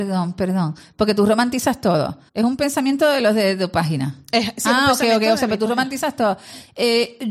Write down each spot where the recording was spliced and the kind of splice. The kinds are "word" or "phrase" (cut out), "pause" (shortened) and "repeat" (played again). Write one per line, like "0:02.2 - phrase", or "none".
0:02.3 - pause